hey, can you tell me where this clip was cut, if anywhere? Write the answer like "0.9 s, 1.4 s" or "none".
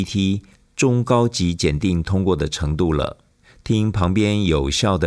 none